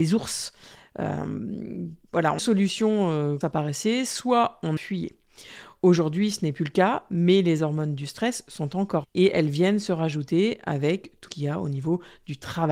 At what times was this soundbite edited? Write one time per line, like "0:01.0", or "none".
0:02.4
0:03.4
0:04.8
0:09.0
0:11.3